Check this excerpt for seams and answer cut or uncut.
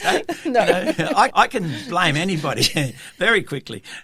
cut